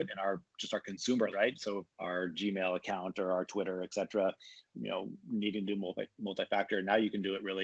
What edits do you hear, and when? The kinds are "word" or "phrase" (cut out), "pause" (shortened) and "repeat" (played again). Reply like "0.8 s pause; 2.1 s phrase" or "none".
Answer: 1.3 s word; 1.9 s word; 4.7 s word